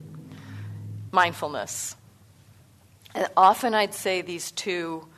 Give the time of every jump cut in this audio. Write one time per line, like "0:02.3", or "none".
0:01.1

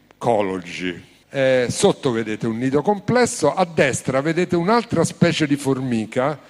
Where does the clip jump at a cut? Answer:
0:01.2

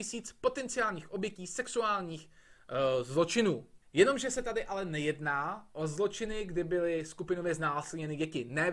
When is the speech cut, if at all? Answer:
0:03.8

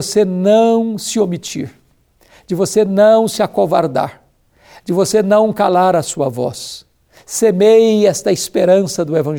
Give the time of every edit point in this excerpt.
none

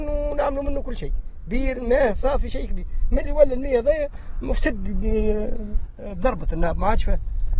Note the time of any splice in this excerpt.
none

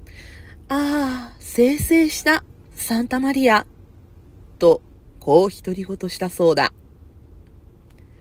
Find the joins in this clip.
none

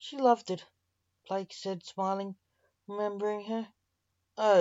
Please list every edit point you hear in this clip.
none

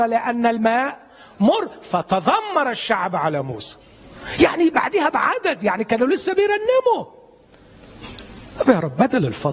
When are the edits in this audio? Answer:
none

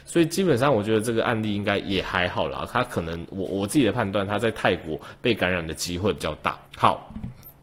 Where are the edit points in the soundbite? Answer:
0:06.7

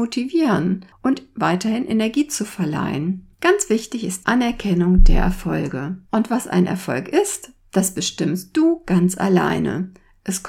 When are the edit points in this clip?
0:01.0
0:03.3
0:04.2
0:06.0

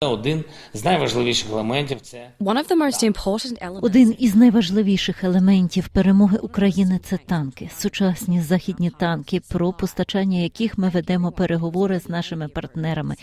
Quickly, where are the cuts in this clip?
none

